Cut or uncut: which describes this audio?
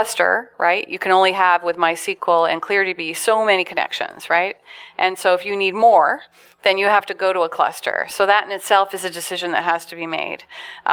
uncut